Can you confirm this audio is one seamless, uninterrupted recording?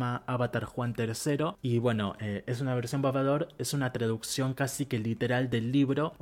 yes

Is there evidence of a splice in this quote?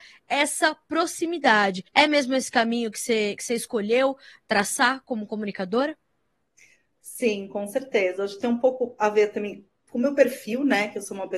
yes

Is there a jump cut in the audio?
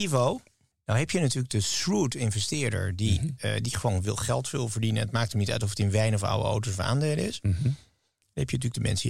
no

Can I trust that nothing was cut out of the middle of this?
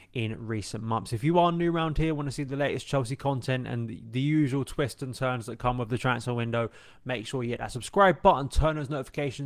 yes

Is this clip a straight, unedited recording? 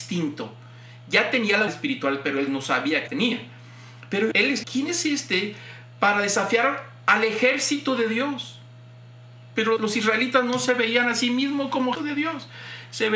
no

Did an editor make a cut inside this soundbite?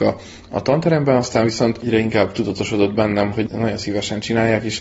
no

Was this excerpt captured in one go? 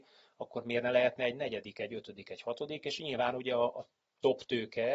yes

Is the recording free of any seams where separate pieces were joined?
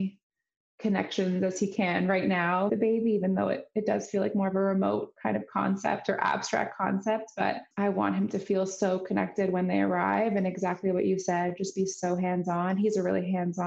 no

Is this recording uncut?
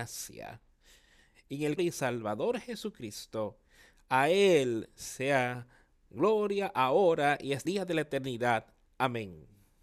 no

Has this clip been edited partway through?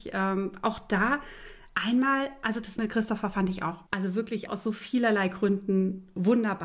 yes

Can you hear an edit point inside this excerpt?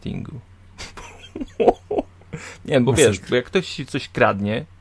no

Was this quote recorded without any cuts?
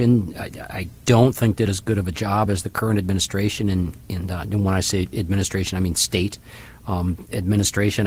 yes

